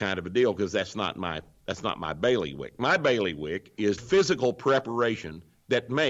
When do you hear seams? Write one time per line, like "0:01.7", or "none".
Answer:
0:04.0